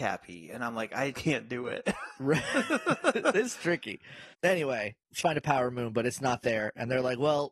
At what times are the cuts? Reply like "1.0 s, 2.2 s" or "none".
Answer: 1.1 s, 4.3 s, 5.2 s